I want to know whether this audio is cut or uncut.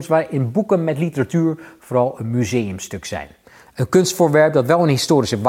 uncut